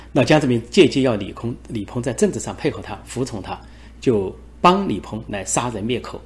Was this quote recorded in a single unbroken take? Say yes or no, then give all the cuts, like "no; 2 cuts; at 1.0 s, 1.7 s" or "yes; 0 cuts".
no; 1 cut; at 3.9 s